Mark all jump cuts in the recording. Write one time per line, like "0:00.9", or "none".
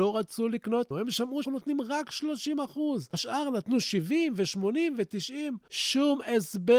0:00.9
0:01.4
0:03.1